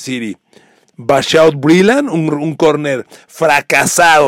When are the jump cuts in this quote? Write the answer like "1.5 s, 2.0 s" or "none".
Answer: none